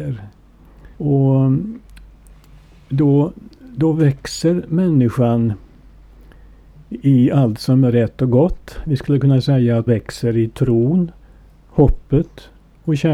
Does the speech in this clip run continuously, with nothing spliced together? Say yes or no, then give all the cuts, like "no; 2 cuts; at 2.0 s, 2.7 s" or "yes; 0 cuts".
no; 2 cuts; at 0.9 s, 9.9 s